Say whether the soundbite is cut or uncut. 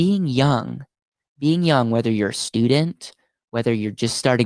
uncut